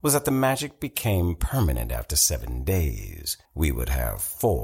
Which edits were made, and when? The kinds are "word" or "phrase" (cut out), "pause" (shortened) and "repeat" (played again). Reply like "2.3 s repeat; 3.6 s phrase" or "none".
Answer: 3.4 s pause